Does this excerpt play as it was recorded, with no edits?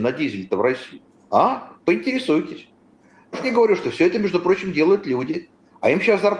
no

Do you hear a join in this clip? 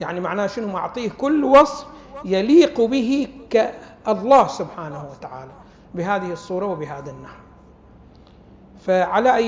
no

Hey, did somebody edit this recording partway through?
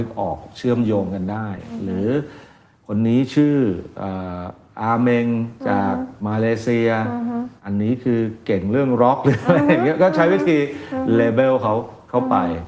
yes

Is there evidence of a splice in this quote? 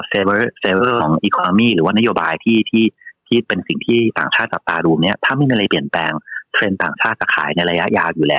no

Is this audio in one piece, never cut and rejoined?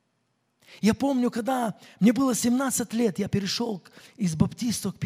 yes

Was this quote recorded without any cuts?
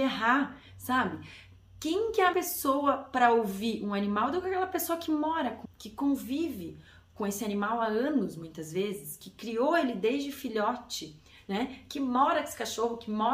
no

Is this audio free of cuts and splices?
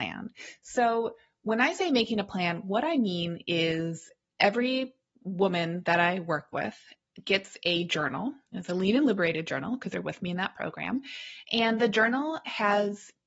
yes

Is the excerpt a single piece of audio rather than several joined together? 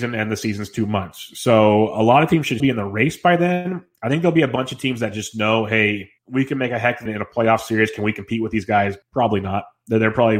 no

